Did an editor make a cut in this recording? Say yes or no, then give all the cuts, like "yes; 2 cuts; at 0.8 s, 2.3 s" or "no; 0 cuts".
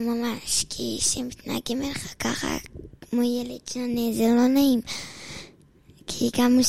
no; 0 cuts